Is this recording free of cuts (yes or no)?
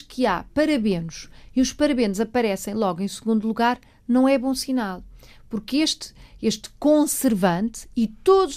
yes